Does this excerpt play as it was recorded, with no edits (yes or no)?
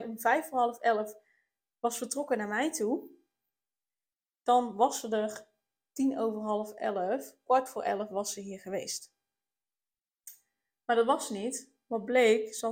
yes